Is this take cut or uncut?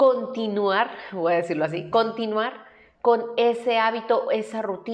uncut